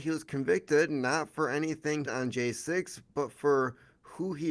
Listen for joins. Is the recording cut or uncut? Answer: cut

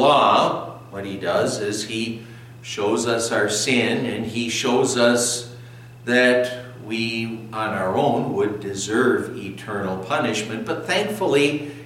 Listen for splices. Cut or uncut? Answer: uncut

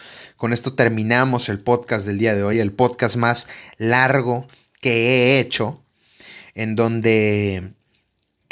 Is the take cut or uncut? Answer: uncut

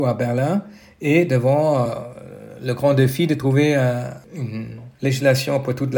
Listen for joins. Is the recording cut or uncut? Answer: uncut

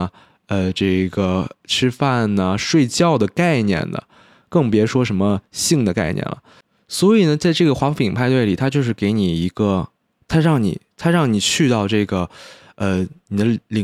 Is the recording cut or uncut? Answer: uncut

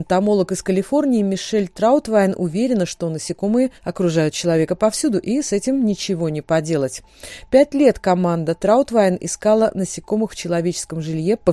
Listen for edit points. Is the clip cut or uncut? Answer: cut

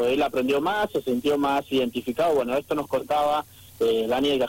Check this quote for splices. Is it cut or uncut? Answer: uncut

